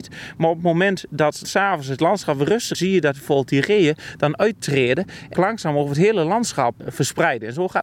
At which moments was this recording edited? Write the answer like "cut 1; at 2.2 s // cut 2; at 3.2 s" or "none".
cut 1; at 1.4 s // cut 2; at 2.7 s // cut 3; at 5.3 s // cut 4; at 6.8 s